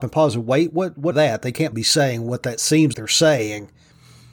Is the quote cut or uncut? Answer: cut